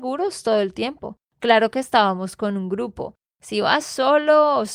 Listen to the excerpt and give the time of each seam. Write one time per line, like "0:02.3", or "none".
none